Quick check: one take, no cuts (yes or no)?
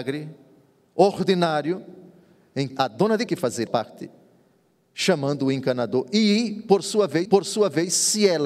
no